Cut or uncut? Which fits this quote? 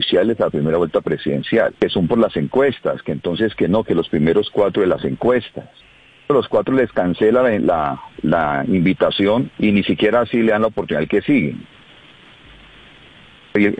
cut